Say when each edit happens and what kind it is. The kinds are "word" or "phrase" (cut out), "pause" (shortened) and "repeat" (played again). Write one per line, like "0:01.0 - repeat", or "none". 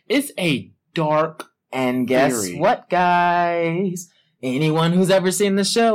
none